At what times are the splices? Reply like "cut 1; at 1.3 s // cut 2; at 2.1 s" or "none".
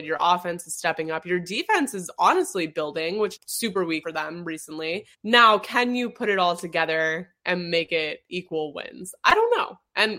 cut 1; at 3.4 s // cut 2; at 4.0 s // cut 3; at 5.1 s